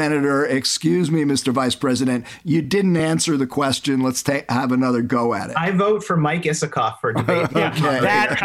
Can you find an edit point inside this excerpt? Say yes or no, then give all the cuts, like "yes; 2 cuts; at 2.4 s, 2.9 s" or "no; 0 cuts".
no; 0 cuts